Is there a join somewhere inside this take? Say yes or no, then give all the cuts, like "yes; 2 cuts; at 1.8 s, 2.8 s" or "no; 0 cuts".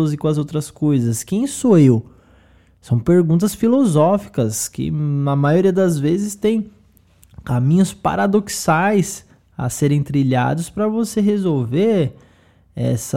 no; 0 cuts